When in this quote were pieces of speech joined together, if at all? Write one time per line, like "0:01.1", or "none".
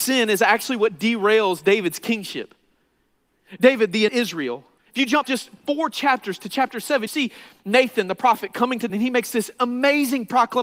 0:04.1
0:04.8
0:05.2
0:07.1
0:08.9